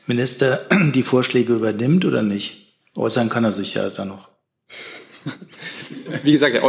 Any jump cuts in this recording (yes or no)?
no